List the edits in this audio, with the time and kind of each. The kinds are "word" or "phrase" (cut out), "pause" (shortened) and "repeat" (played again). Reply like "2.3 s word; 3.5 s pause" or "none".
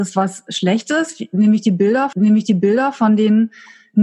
2.1 s repeat